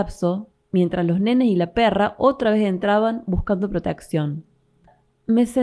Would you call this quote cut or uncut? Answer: uncut